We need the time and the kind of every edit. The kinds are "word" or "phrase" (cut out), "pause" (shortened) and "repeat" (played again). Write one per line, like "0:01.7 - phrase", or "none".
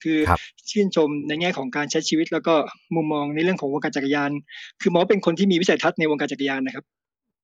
none